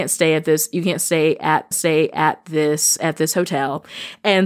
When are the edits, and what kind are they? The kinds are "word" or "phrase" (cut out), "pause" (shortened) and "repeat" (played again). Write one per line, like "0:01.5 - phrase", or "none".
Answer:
0:01.7 - repeat